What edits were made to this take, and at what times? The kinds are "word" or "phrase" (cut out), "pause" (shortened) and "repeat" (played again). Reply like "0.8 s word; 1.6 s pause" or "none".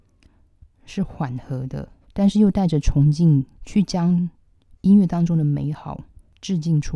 2.0 s pause; 3.5 s pause